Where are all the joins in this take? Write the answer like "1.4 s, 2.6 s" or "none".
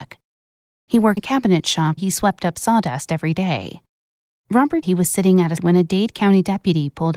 1.2 s, 2.0 s, 4.8 s, 5.6 s